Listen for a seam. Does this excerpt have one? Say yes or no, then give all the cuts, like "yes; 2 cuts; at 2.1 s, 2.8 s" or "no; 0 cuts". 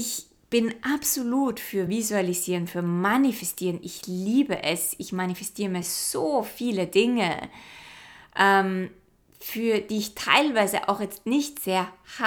no; 0 cuts